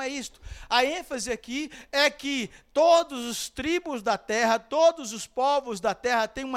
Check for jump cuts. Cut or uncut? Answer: uncut